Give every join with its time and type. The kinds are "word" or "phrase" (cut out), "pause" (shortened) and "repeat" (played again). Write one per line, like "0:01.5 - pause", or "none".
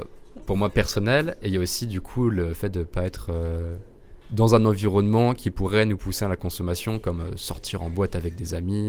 0:04.2 - pause

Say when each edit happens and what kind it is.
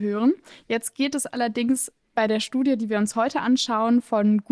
none

